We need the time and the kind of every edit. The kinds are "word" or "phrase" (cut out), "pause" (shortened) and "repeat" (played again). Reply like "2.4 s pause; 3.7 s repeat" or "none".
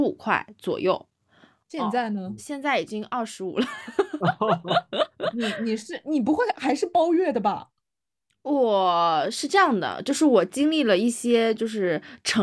2.4 s word